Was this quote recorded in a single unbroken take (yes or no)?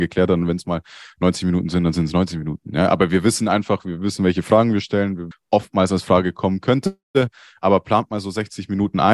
no